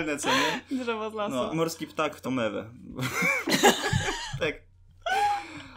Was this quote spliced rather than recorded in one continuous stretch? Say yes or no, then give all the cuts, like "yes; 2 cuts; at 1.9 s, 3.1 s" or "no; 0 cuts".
yes; 2 cuts; at 1.5 s, 2.2 s